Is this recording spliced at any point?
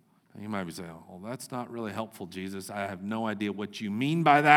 no; 0 cuts

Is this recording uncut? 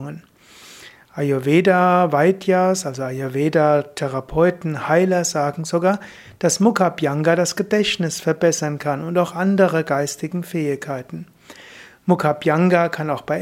yes; 0 cuts

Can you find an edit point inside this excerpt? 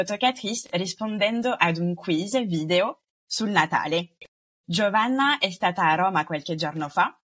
no; 0 cuts

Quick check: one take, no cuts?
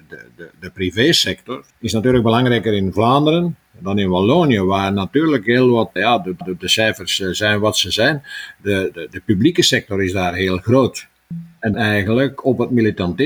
no; 5 cuts; at 1.7 s, 6.0 s, 6.4 s, 8.9 s, 11.7 s

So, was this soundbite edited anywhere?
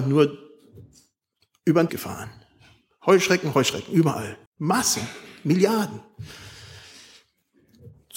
yes; 3 cuts; at 1.9 s, 3.5 s, 4.5 s

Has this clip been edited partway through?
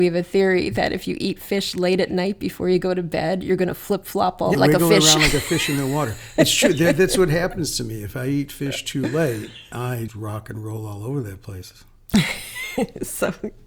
yes; 3 cuts; at 4.5 s, 9.7 s, 10.1 s

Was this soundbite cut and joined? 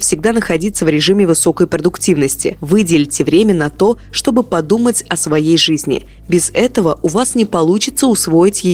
no; 0 cuts

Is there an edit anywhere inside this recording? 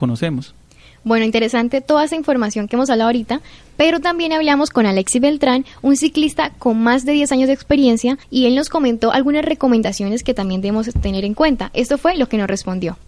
yes; 1 cut; at 8.2 s

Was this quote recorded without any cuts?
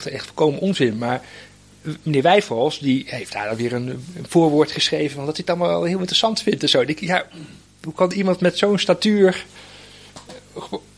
yes; 0 cuts

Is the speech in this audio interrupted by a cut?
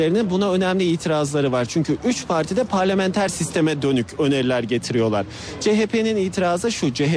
no; 0 cuts

